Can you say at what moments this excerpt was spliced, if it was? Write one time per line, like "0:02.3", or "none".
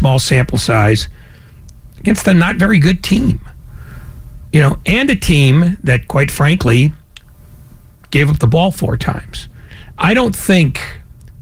none